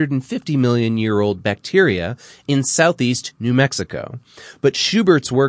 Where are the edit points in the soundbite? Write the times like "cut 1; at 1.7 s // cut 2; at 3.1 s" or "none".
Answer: none